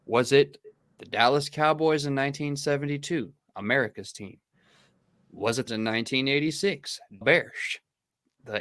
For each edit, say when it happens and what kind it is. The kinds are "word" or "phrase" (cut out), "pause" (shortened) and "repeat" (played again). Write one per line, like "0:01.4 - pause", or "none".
0:05.7 - phrase
0:07.2 - word